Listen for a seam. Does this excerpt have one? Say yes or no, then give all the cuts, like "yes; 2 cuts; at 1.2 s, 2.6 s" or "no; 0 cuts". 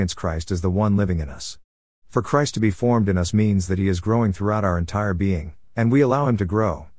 no; 0 cuts